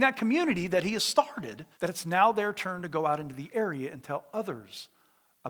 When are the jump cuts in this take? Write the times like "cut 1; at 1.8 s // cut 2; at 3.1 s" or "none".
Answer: cut 1; at 1.7 s